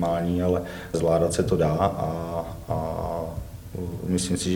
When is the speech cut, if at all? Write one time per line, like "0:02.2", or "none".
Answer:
0:00.9

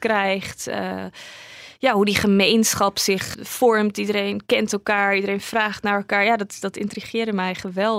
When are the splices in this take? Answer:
0:03.3

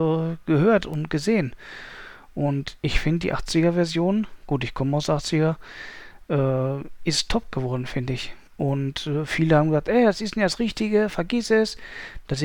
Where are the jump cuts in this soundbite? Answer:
0:08.5

